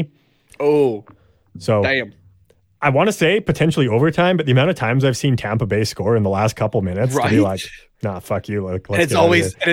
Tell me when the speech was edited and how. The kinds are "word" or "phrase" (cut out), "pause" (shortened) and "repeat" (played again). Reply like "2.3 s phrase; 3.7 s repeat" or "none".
none